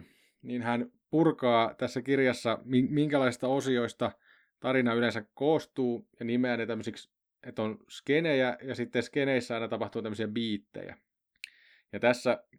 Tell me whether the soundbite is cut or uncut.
uncut